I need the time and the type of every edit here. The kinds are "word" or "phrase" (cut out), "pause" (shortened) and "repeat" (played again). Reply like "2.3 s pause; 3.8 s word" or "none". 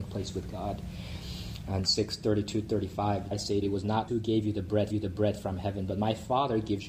1.8 s phrase; 3.3 s phrase; 3.6 s phrase; 4.1 s word; 4.9 s repeat